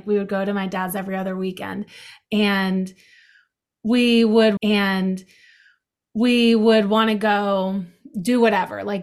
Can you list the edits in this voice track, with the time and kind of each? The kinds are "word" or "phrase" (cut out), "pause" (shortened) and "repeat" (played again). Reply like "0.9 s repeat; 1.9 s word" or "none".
4.6 s repeat